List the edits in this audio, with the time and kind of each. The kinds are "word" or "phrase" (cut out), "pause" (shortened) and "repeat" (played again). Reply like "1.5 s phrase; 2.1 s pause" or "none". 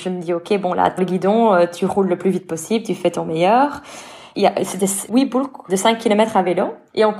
1.0 s word; 5.1 s word; 5.7 s word